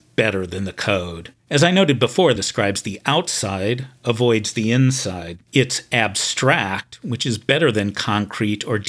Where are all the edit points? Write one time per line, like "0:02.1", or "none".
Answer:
0:01.4
0:02.4
0:05.4